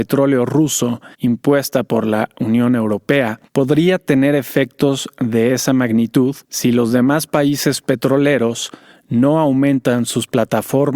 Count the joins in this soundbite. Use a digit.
3